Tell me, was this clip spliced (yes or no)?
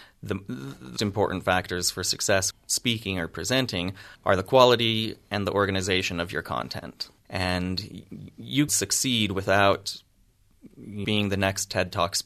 yes